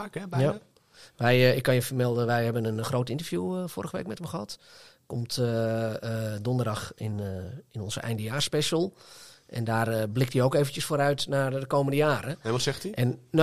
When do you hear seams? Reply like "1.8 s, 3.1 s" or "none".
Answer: none